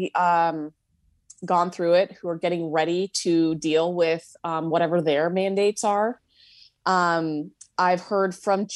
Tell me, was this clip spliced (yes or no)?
no